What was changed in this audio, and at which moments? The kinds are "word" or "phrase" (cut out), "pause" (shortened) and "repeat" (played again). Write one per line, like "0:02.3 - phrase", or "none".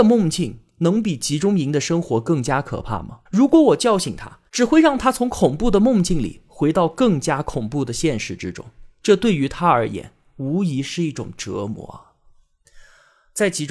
0:03.3 - pause
0:04.5 - pause